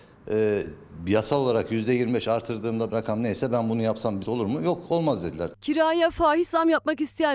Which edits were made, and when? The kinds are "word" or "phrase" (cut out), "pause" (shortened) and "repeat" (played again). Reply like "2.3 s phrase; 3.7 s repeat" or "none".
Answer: 2.9 s phrase; 4.2 s word